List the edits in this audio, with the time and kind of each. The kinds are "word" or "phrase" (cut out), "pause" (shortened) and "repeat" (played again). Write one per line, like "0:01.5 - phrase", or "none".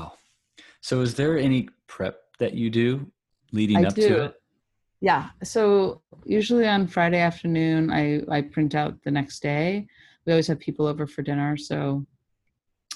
none